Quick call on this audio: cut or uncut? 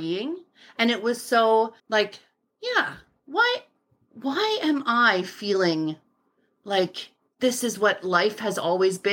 cut